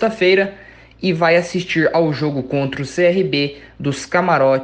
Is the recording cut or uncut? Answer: uncut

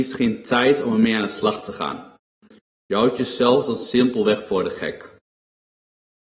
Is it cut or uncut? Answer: uncut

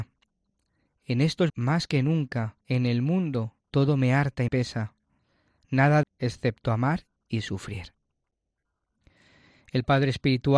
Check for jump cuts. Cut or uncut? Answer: cut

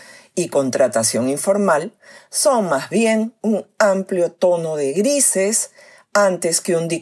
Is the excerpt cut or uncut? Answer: uncut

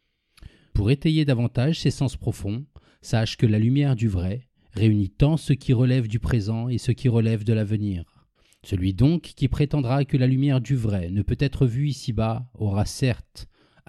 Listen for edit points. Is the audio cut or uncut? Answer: cut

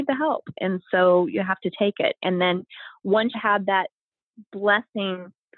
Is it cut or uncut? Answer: cut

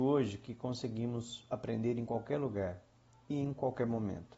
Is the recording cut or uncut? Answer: uncut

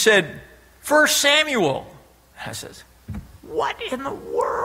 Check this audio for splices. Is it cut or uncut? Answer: uncut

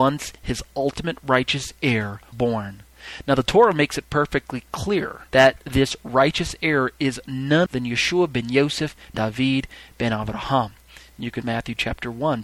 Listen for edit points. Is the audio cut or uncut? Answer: cut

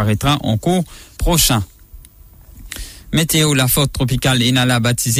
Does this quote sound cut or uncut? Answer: cut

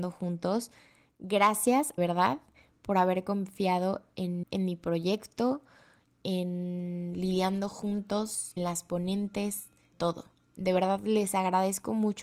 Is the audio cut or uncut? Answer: cut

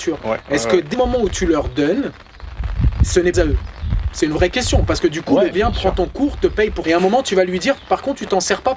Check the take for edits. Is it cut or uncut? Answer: cut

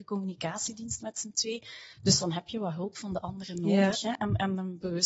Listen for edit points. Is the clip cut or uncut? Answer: cut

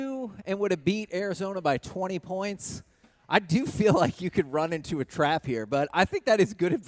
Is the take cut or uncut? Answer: uncut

